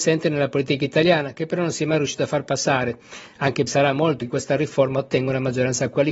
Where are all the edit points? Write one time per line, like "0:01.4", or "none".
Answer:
0:03.7
0:04.2